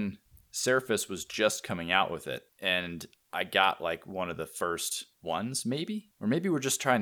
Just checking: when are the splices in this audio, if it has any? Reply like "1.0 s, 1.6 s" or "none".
none